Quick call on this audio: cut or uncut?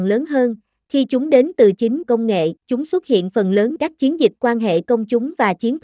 cut